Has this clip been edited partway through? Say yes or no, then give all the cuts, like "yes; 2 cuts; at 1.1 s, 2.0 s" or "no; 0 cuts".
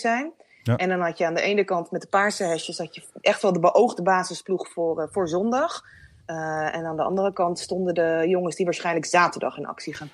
no; 0 cuts